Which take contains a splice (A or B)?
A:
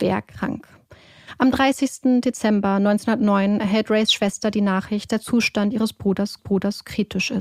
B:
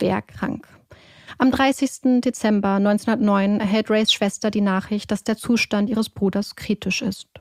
A